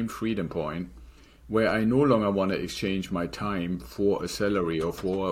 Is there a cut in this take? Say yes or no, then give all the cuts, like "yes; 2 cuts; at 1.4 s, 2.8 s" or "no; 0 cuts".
no; 0 cuts